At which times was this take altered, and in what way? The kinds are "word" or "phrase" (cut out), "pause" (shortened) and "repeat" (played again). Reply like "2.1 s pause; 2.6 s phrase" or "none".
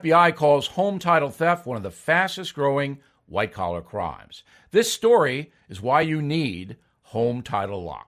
none

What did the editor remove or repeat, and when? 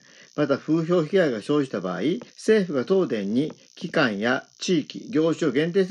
2.3 s pause

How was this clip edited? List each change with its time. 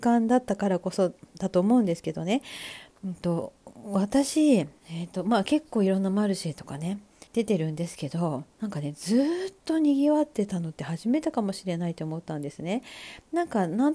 4.8 s pause; 7.3 s pause; 8.5 s pause

